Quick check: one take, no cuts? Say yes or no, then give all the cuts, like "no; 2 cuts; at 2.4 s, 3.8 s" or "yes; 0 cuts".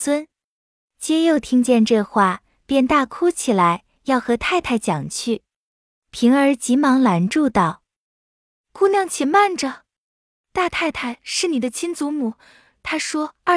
yes; 0 cuts